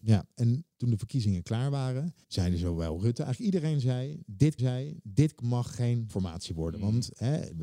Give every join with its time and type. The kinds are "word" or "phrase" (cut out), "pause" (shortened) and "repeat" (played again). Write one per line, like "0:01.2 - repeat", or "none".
0:02.2 - pause
0:04.6 - repeat
0:06.1 - word